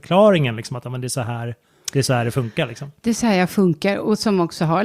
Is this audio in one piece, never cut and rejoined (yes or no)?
yes